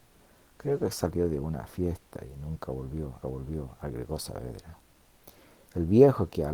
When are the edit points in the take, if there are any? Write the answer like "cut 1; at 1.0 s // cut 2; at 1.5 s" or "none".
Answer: cut 1; at 3.2 s